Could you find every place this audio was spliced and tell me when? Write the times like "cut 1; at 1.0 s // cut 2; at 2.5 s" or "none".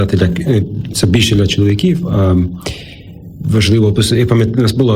cut 1; at 0.9 s